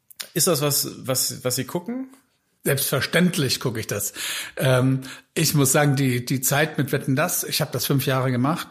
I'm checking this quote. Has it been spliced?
no; 0 cuts

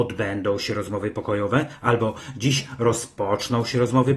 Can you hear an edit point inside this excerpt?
no; 0 cuts

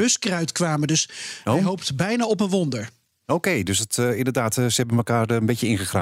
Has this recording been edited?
no; 0 cuts

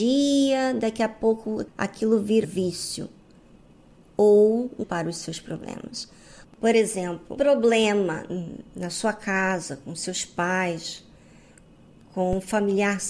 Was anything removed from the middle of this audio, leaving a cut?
yes; 3 cuts; at 2.4 s, 4.8 s, 7.4 s

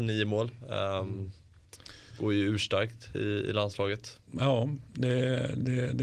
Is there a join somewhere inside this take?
no; 0 cuts

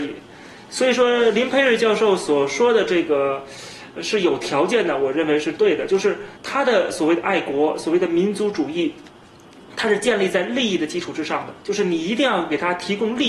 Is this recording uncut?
no; 1 cut; at 6.4 s

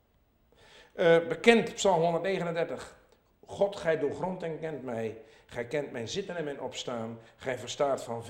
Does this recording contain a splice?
no; 0 cuts

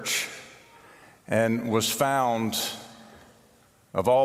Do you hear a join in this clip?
no; 0 cuts

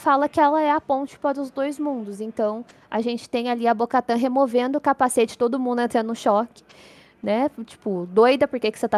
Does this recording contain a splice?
no; 0 cuts

